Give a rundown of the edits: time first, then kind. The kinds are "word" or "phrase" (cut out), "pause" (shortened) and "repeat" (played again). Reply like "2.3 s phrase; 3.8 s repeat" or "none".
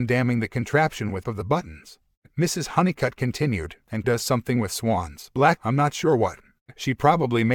1.2 s phrase; 4.0 s word; 5.6 s word

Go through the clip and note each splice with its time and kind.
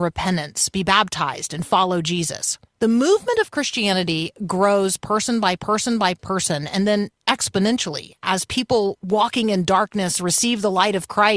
2.7 s pause; 5.6 s repeat

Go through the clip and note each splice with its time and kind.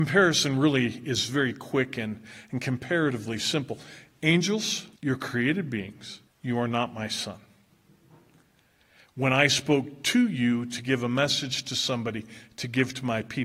5.0 s pause; 6.3 s pause

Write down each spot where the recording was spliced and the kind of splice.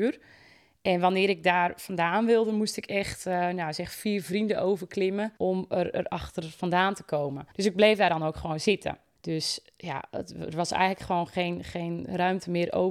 5.4 s pause; 7.5 s pause

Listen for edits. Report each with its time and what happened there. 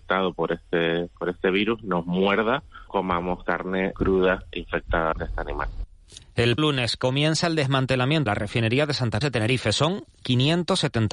2.9 s word; 3.9 s word; 5.1 s word; 6.6 s word; 8.3 s word; 9.2 s word

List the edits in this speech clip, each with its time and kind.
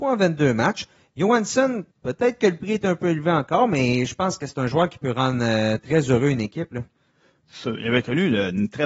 1.9 s pause

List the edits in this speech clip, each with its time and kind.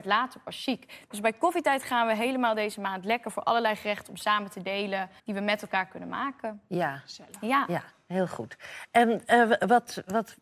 5.2 s pause

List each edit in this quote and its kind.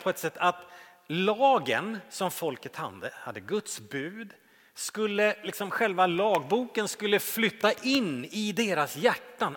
none

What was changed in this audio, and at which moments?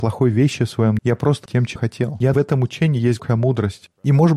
1.0 s word; 1.5 s phrase; 1.8 s word; 2.3 s word; 3.2 s word

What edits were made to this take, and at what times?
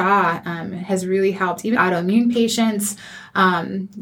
1.8 s word

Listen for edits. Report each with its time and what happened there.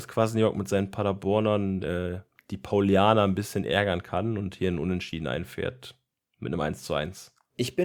none

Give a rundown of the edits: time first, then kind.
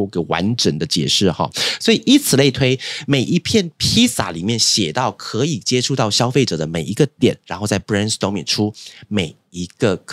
none

